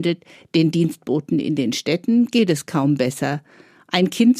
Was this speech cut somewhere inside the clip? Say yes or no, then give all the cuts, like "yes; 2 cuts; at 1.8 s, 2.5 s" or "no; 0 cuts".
no; 0 cuts